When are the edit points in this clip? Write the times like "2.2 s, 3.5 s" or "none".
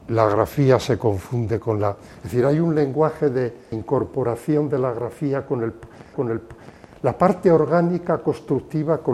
3.7 s, 6.1 s